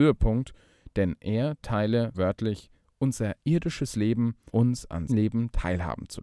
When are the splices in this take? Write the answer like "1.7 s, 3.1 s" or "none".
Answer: 2.1 s, 4.5 s, 5.1 s

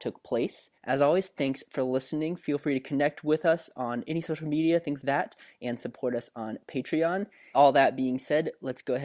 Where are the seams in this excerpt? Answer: 5.0 s, 7.5 s

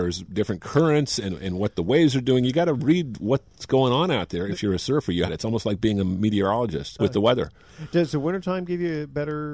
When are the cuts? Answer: 5.3 s, 7.0 s

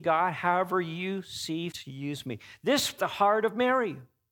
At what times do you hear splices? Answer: 1.7 s, 3.0 s

